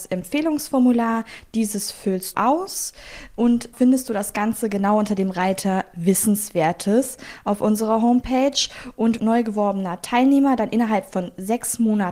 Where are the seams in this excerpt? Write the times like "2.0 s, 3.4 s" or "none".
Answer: 2.3 s, 3.7 s, 9.2 s